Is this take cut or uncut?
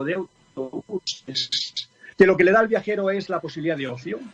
cut